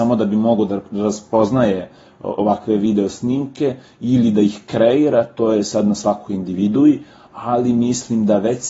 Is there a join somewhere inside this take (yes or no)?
no